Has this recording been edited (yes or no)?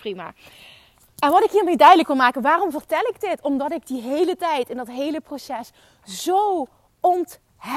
no